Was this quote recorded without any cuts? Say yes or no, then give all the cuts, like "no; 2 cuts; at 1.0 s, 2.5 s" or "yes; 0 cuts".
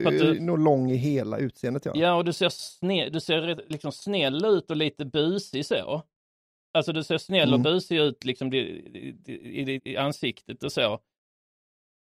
no; 1 cut; at 9.8 s